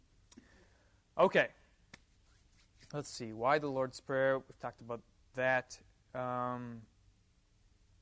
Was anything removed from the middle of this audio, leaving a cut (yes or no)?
no